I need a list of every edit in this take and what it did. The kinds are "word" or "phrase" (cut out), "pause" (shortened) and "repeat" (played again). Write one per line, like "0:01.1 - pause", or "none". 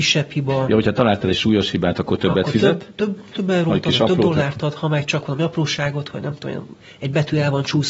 none